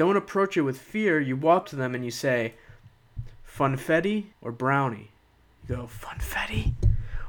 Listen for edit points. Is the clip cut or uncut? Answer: cut